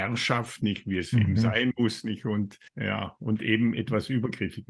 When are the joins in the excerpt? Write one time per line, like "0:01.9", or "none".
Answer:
0:02.7